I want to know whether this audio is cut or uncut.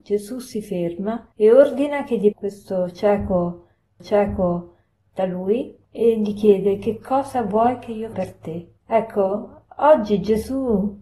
cut